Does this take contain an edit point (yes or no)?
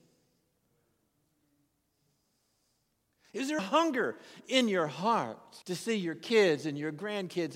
yes